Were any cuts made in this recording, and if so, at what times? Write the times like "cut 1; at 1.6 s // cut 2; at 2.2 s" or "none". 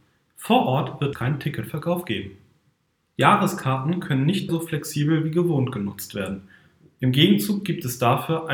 cut 1; at 1.1 s // cut 2; at 4.5 s